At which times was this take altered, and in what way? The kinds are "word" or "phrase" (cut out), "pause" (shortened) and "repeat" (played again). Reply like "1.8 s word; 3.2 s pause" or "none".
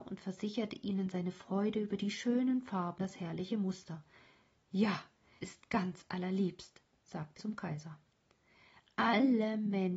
3.0 s word; 5.4 s word; 7.4 s word